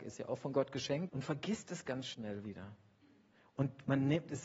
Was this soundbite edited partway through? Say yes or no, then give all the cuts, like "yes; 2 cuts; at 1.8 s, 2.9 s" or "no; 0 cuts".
yes; 1 cut; at 1.1 s